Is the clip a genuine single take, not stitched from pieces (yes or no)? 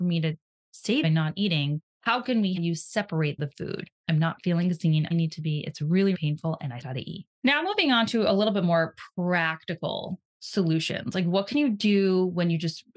no